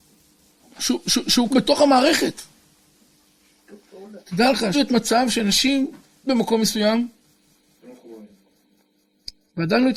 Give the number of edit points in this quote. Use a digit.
4